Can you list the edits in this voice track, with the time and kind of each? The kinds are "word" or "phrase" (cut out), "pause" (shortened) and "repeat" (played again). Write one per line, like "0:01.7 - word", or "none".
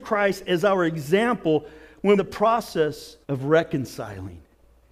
0:02.2 - phrase
0:03.2 - pause